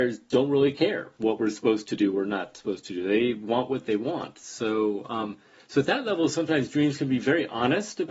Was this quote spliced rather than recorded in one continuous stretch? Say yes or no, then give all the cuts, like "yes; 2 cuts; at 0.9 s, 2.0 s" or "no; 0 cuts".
no; 0 cuts